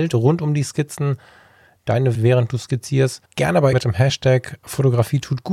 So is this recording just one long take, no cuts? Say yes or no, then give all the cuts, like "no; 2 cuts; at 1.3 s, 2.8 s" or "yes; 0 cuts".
no; 3 cuts; at 2.1 s, 3.3 s, 3.7 s